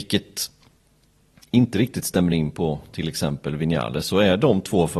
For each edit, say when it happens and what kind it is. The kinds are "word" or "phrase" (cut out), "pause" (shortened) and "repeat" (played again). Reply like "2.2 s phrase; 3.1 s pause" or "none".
none

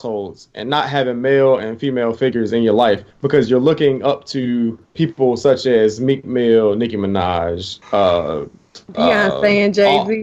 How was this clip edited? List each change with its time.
3.1 s pause; 4.8 s pause; 7.8 s pause

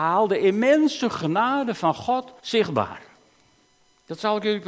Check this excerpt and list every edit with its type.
2.4 s pause

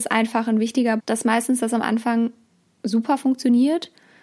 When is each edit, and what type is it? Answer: 1.0 s word

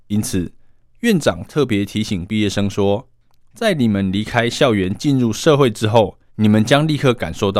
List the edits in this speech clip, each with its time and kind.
6.3 s pause

